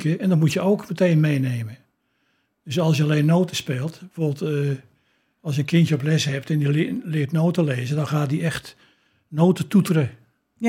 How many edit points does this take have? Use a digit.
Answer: 0